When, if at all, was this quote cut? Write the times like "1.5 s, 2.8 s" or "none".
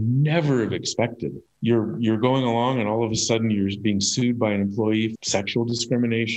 1.5 s, 5.1 s